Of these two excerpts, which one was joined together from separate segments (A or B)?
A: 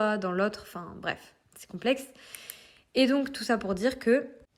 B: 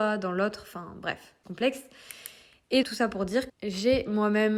B